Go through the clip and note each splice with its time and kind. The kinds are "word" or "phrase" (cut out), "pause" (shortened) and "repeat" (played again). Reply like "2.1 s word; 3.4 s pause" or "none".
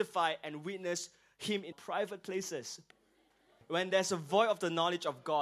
1.7 s word